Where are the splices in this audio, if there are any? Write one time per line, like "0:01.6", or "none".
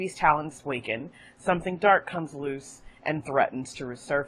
none